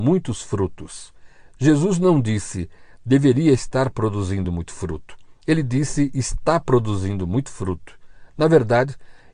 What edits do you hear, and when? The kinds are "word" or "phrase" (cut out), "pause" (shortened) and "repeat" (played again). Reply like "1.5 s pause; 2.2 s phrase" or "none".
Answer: none